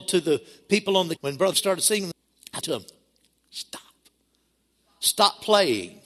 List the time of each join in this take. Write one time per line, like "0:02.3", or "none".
0:01.2
0:01.5
0:02.1
0:02.6